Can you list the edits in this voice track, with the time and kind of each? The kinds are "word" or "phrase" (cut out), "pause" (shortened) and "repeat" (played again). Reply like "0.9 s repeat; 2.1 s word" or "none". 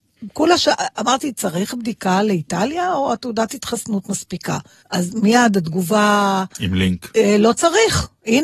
4.8 s pause